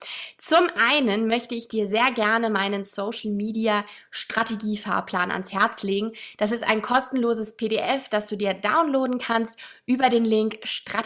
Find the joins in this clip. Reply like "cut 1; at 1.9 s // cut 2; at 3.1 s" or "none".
none